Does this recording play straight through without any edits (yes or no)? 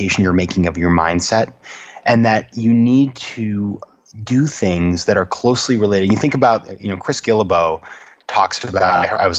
yes